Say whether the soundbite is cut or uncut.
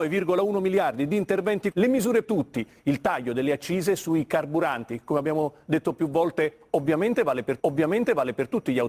cut